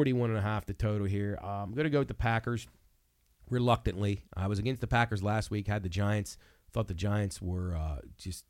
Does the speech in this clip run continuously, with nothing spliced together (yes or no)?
yes